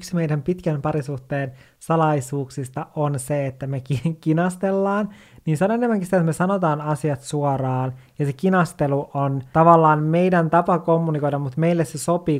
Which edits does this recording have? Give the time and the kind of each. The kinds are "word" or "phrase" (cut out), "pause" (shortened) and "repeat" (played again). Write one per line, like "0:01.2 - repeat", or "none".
none